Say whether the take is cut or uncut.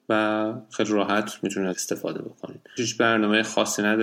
cut